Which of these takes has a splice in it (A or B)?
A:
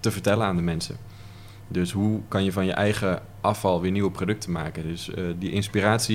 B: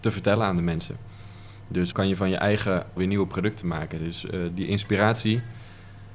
B